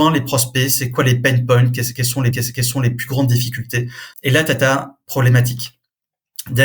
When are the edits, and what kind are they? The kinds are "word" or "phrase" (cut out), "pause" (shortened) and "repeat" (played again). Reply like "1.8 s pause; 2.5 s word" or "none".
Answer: 2.3 s repeat; 4.1 s pause